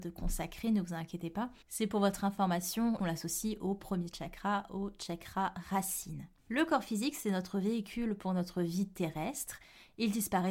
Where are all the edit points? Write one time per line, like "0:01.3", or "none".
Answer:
0:01.6
0:03.0

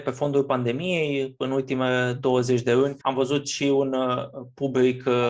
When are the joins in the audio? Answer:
0:03.0

